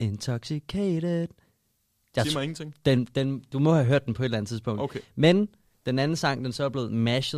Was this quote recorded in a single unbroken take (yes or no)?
yes